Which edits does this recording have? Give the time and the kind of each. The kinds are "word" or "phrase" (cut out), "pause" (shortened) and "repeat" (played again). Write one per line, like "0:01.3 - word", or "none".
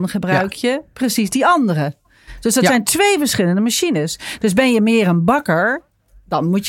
none